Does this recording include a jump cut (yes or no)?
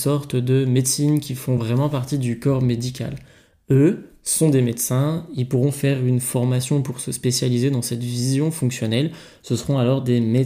no